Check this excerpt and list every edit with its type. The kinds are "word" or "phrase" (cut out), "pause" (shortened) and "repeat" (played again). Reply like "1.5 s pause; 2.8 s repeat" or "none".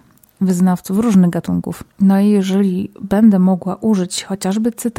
3.0 s pause